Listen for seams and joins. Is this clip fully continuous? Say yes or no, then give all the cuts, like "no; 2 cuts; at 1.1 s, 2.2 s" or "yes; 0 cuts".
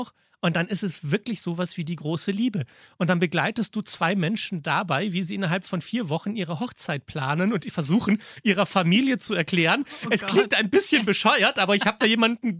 yes; 0 cuts